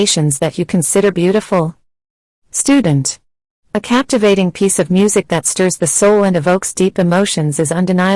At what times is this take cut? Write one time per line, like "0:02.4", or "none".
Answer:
none